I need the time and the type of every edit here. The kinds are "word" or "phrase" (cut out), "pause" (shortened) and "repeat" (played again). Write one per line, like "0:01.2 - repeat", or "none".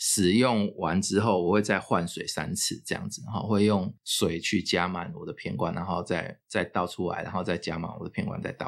0:06.4 - pause